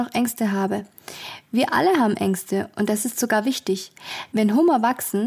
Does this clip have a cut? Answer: no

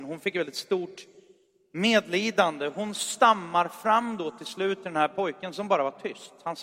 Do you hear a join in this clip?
no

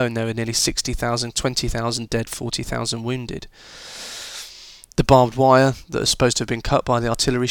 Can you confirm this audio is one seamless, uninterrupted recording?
no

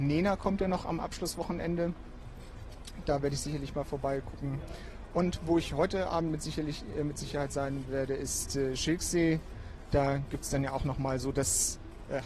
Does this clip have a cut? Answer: no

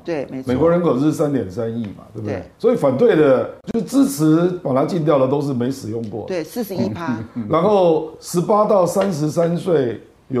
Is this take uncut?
no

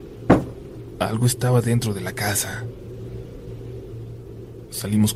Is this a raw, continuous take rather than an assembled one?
yes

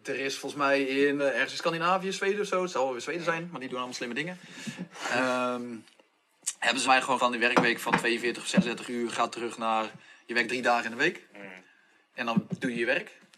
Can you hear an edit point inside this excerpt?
yes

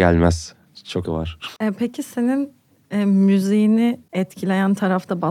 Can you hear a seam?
yes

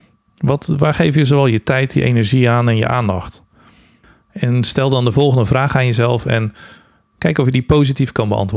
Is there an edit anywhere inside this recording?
no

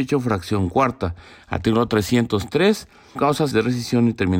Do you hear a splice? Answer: yes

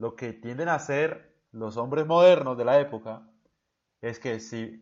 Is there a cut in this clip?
yes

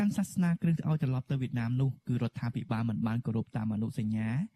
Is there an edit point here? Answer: yes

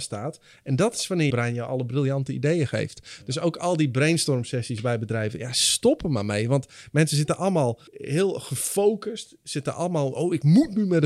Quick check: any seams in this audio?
yes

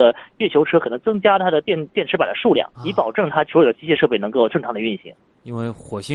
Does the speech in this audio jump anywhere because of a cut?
yes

